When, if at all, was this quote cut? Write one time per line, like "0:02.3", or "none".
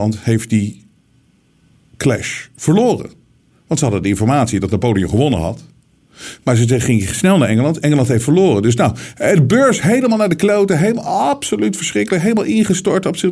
none